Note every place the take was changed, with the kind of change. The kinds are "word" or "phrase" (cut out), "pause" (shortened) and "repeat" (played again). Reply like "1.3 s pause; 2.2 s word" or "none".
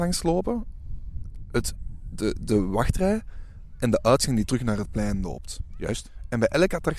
none